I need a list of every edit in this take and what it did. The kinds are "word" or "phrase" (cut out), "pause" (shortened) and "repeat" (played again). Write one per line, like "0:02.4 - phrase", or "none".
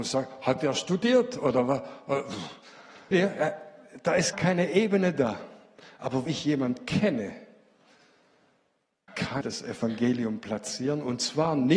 0:03.1 - word
0:04.3 - word
0:06.3 - word
0:09.1 - word
0:09.4 - word